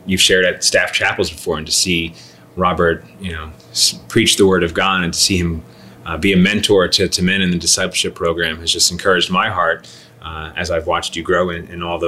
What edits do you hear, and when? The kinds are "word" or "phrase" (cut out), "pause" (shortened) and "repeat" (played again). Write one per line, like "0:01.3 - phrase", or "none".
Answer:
none